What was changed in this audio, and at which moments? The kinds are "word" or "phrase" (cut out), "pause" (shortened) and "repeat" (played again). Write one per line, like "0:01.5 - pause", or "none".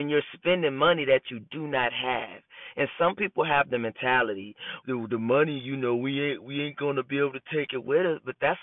0:04.8 - word